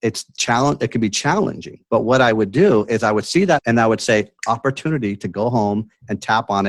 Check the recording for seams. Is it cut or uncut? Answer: cut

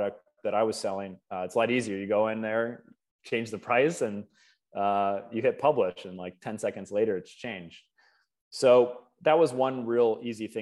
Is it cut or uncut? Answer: uncut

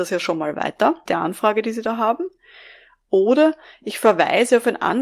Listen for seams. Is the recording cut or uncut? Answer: cut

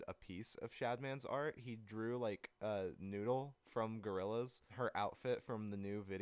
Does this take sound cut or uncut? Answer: cut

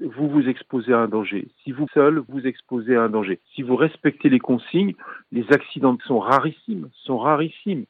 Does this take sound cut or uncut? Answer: cut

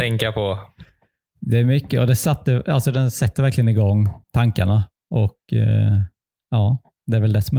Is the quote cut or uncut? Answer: cut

